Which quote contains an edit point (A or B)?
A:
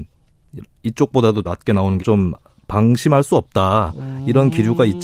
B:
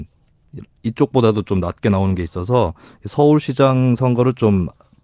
A